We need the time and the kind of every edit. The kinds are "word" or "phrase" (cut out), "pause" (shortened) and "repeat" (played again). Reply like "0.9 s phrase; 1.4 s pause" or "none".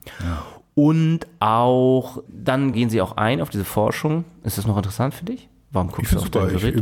2.3 s word; 2.7 s word